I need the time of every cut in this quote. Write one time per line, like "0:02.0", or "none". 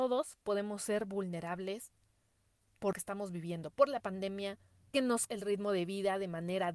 0:02.9
0:04.9
0:05.3